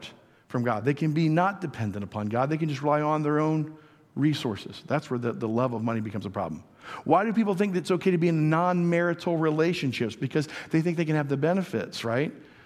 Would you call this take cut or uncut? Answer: uncut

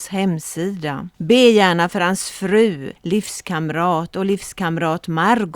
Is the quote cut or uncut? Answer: cut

